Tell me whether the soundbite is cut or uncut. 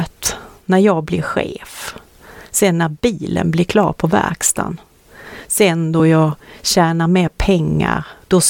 uncut